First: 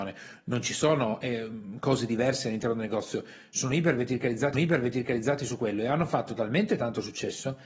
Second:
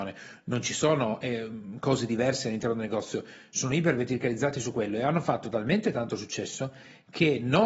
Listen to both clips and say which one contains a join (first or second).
first